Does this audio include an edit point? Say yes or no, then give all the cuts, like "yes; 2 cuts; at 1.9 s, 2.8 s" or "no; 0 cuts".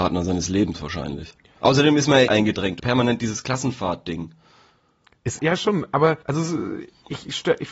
yes; 4 cuts; at 2.3 s, 2.8 s, 5.4 s, 6.2 s